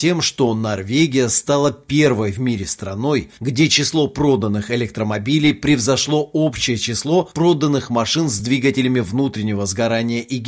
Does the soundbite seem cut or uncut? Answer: uncut